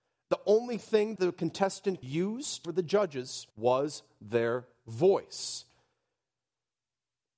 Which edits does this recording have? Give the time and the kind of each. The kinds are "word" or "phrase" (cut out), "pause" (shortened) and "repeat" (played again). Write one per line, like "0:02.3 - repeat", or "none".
0:01.2 - word
0:02.0 - word
0:02.6 - phrase
0:03.5 - pause